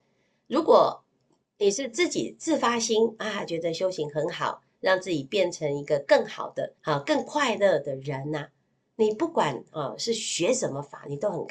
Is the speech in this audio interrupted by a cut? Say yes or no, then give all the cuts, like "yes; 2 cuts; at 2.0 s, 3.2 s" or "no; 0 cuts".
yes; 1 cut; at 6.8 s